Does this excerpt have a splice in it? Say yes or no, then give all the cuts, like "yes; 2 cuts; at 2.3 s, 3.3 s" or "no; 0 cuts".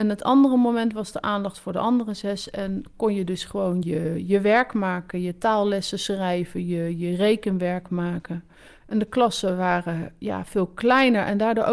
yes; 1 cut; at 3.8 s